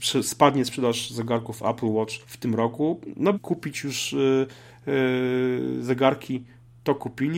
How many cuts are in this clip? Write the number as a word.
two